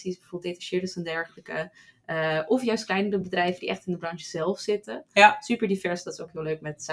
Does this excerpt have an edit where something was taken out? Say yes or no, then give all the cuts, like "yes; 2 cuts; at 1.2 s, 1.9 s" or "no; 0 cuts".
no; 0 cuts